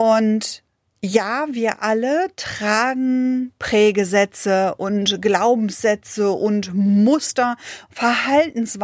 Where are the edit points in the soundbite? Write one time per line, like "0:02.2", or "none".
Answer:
none